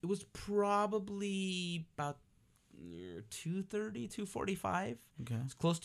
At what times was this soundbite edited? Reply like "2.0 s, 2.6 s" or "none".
none